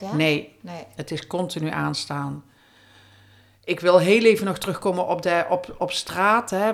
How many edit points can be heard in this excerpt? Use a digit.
0